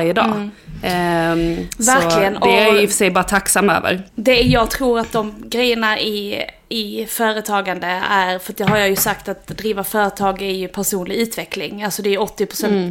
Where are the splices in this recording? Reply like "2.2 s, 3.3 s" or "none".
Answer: 4.1 s